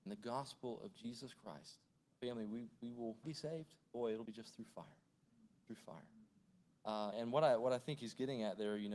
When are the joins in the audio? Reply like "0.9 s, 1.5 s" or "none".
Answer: 1.9 s, 3.2 s, 3.8 s, 4.3 s, 5.7 s, 7.1 s